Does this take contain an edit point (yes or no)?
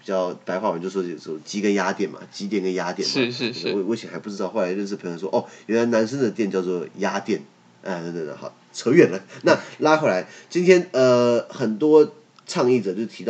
no